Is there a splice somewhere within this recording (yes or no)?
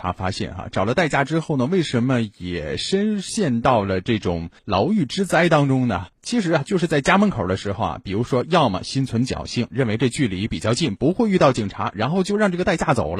yes